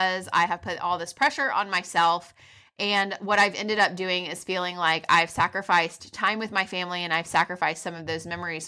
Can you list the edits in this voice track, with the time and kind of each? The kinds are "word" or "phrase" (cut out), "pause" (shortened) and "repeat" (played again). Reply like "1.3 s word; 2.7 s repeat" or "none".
none